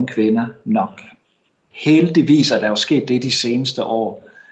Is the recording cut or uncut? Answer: uncut